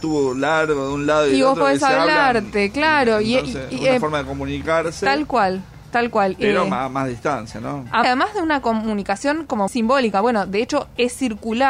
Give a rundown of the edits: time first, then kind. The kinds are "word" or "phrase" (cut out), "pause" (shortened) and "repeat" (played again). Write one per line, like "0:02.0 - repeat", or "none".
0:08.0 - phrase
0:09.7 - word

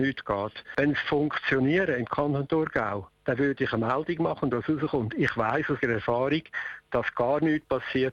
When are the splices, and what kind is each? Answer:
0:01.0 - word
0:04.5 - word
0:05.8 - word

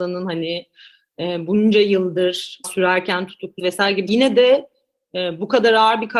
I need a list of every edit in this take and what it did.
0:02.6 - word
0:03.6 - word
0:04.1 - word

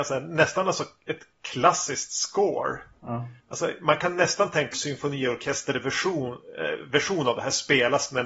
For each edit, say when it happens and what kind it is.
0:03.4 - pause
0:04.7 - phrase

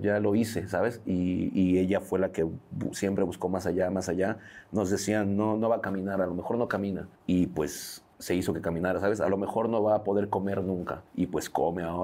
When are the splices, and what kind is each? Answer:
0:07.2 - pause
0:08.1 - pause
0:11.1 - pause

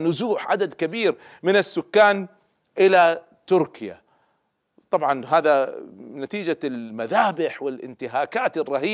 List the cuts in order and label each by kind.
none

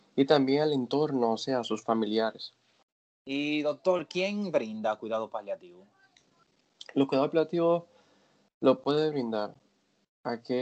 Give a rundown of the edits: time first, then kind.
none

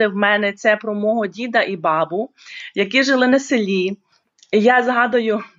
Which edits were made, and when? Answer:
0:04.2 - pause

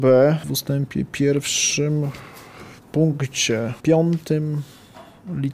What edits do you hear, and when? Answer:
0:03.8 - pause

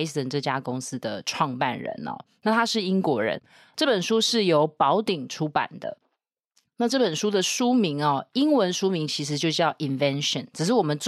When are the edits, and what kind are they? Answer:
none

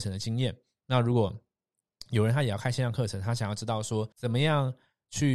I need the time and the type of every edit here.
0:04.1 - pause

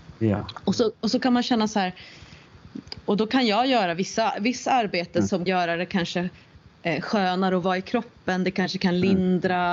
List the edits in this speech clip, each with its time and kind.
0:05.5 - phrase

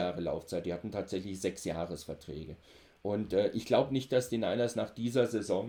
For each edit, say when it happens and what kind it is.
none

